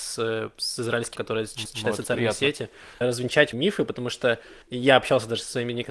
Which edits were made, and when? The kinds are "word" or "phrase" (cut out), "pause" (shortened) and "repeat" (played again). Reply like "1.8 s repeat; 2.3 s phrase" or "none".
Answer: 1.2 s word; 1.7 s repeat; 3.0 s phrase; 3.5 s word; 4.6 s pause